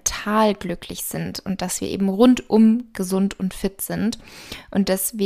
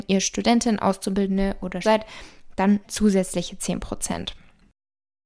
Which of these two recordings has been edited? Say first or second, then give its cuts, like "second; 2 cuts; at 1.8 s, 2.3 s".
second; 2 cuts; at 1.8 s, 2.8 s